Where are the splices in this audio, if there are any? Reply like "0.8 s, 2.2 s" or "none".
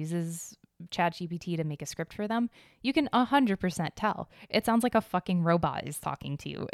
none